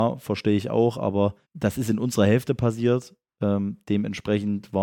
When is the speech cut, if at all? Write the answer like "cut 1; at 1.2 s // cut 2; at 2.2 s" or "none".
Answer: cut 1; at 1.4 s